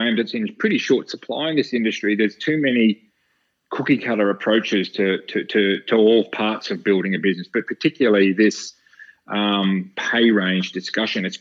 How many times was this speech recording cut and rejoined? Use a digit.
0